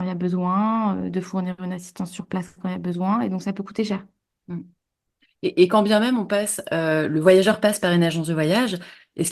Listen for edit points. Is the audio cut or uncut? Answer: uncut